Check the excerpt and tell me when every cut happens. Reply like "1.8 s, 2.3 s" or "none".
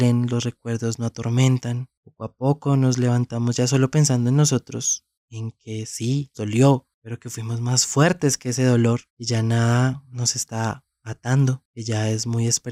6.3 s, 9.1 s

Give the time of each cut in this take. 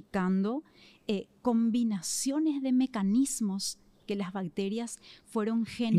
none

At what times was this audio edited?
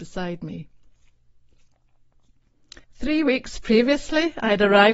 2.8 s

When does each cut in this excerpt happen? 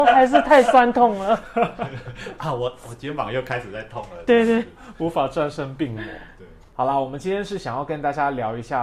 none

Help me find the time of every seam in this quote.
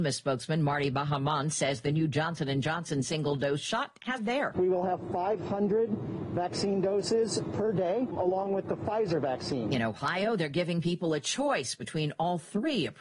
4.2 s

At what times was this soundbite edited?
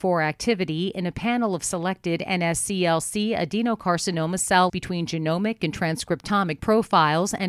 4.7 s

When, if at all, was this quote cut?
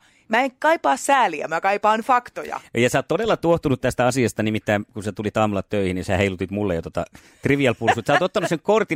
none

